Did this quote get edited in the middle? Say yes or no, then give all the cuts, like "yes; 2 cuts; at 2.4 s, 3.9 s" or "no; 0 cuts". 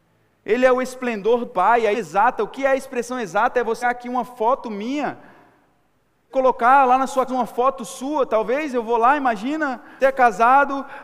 yes; 6 cuts; at 1.5 s, 1.9 s, 3.8 s, 6.3 s, 7.3 s, 10.0 s